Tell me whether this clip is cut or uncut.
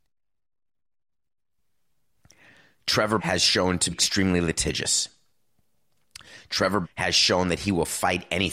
cut